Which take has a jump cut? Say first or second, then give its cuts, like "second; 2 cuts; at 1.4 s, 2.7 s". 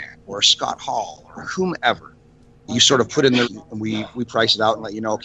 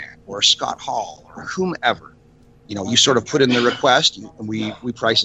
first; 2 cuts; at 2.7 s, 3.4 s